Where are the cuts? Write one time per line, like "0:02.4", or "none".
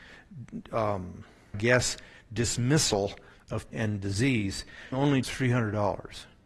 0:01.5
0:03.7
0:04.9
0:05.2